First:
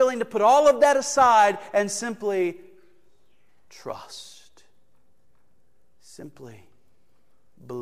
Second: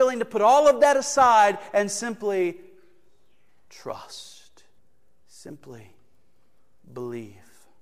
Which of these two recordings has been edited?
second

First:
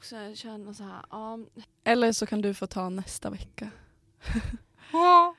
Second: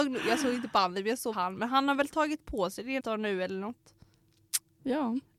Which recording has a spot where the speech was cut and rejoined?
second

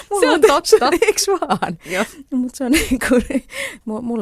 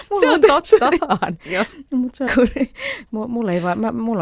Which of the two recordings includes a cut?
second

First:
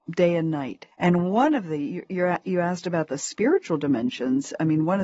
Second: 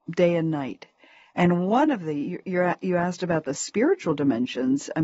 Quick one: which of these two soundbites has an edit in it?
first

